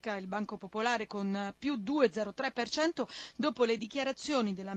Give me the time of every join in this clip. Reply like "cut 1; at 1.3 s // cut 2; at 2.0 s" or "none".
none